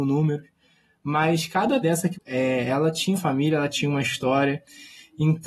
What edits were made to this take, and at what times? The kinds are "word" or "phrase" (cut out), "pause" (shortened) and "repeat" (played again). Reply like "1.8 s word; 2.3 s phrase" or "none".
1.8 s word; 2.1 s word; 3.1 s word